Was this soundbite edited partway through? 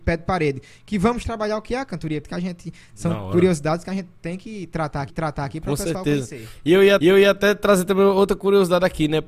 yes; 4 cuts; at 1.2 s, 2.2 s, 5.1 s, 7.0 s

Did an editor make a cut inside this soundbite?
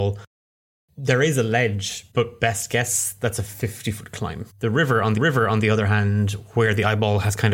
yes; 3 cuts; at 2.1 s, 4.5 s, 5.2 s

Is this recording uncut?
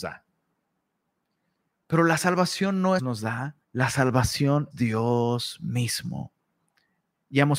no; 3 cuts; at 3.0 s, 3.6 s, 4.7 s

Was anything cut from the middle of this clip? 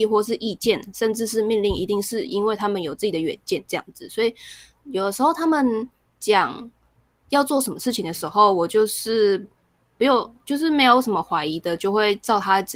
no; 0 cuts

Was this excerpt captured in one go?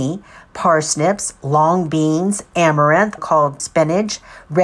no; 2 cuts; at 3.2 s, 3.6 s

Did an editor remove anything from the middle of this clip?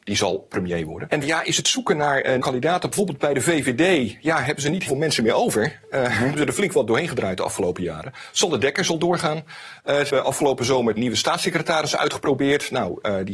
yes; 6 cuts; at 1.2 s, 2.4 s, 4.9 s, 6.3 s, 10.1 s, 11.0 s

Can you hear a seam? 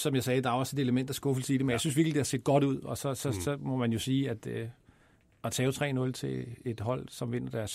no; 0 cuts

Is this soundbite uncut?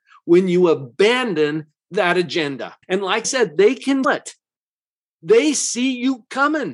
no; 3 cuts; at 2.8 s, 3.2 s, 4.0 s

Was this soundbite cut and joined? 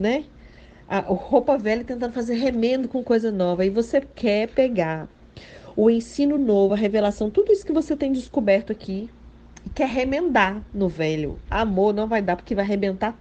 no; 0 cuts

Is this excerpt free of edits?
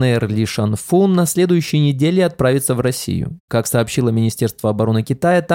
yes; 0 cuts

